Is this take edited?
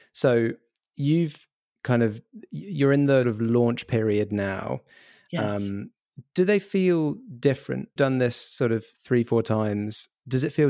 yes; 2 cuts; at 3.2 s, 8.0 s

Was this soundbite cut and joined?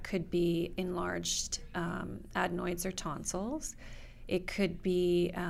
no; 0 cuts

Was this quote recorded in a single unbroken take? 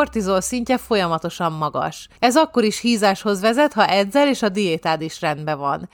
no; 1 cut; at 2.2 s

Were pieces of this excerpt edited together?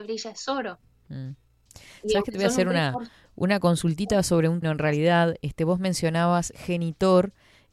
yes; 2 cuts; at 4.6 s, 6.5 s

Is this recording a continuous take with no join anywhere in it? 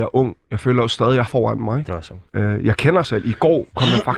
no; 4 cuts; at 1.3 s, 1.9 s, 2.3 s, 3.0 s

